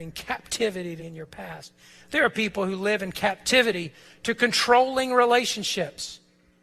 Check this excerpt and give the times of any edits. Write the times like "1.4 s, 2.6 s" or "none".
1.0 s